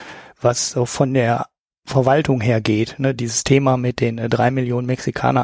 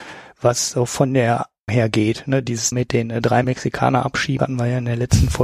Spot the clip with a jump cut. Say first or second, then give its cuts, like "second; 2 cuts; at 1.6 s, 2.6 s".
second; 4 cuts; at 1.7 s, 2.7 s, 3.4 s, 4.4 s